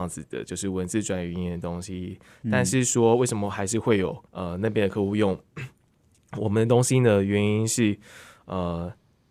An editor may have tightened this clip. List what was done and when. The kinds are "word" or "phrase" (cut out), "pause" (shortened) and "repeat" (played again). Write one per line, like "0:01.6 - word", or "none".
0:04.3 - pause
0:05.7 - pause